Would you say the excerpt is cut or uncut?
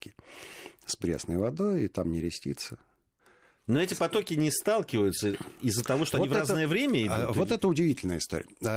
uncut